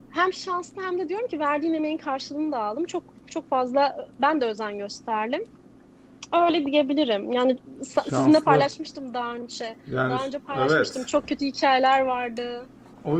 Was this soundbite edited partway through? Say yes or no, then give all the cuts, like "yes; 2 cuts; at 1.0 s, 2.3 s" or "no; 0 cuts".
yes; 1 cut; at 4.1 s